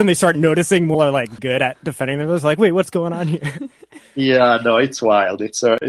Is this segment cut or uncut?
cut